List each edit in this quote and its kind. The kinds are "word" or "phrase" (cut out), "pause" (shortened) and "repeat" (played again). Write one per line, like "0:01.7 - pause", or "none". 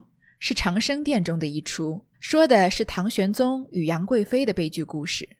0:02.1 - pause